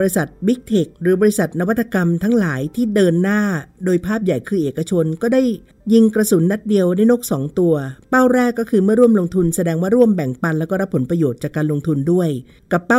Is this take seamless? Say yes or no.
yes